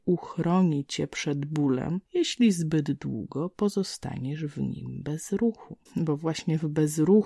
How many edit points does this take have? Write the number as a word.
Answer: two